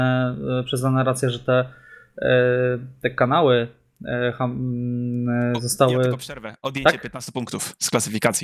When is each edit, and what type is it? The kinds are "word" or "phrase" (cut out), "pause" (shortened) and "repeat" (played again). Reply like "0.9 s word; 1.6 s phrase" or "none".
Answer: none

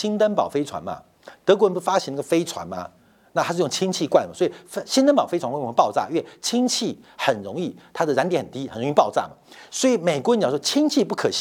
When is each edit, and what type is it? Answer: none

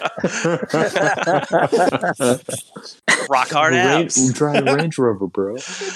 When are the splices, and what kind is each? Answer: none

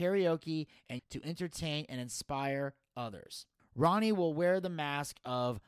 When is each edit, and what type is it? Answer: 1.0 s phrase

